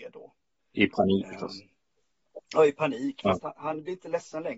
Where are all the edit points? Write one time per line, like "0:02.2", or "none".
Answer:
0:01.2